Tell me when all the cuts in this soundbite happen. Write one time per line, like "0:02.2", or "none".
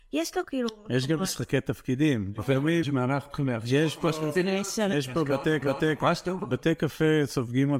0:02.8
0:05.6

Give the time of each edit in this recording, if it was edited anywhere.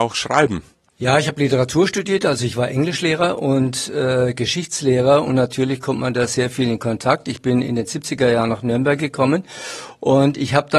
none

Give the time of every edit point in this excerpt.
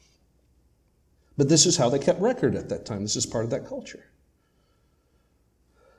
none

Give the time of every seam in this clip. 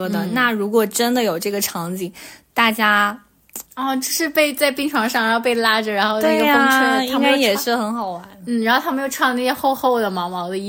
0:03.7

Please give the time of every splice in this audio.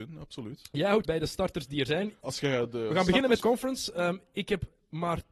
0:01.0
0:02.2
0:03.4

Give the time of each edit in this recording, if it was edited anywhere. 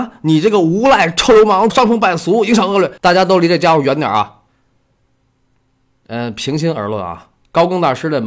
0:01.7
0:03.0

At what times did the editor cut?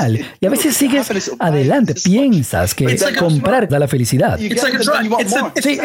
0:02.0
0:03.7

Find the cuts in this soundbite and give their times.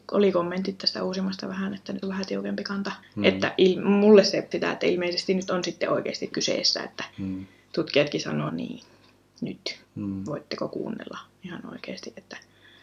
0:01.4
0:02.0
0:03.0
0:04.5
0:06.3
0:07.1
0:08.5
0:09.8

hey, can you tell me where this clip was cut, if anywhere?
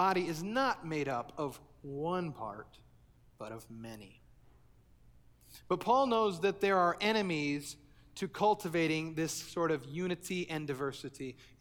none

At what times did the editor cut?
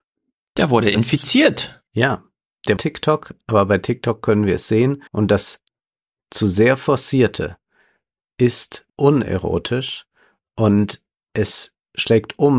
0:01.9
0:02.8
0:05.1
0:08.9

